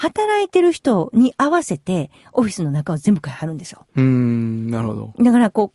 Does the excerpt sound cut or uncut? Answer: cut